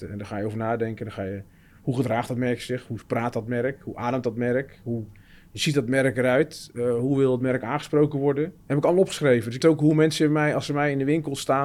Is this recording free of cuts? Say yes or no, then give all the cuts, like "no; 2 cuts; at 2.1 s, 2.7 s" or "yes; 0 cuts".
no; 2 cuts; at 8.6 s, 9.6 s